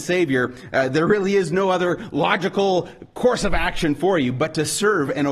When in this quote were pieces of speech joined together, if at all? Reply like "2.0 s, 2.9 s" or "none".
none